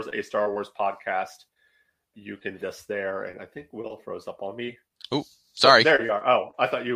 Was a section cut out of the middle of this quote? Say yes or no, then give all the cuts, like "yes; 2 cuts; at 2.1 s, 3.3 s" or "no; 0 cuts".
yes; 2 cuts; at 2.1 s, 2.6 s